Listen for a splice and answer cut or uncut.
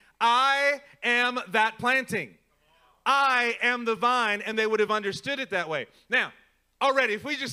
uncut